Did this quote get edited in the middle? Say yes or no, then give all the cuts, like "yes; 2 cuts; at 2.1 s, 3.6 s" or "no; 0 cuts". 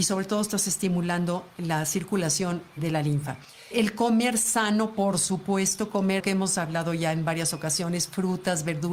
yes; 1 cut; at 6.2 s